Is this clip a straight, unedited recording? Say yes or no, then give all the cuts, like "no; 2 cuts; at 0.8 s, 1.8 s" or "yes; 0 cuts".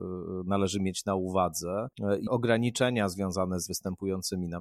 no; 2 cuts; at 2.3 s, 3.7 s